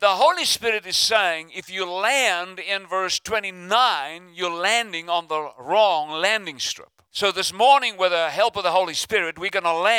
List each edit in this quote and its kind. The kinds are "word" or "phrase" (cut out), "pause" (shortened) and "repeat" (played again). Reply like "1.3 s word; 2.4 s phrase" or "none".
7.1 s pause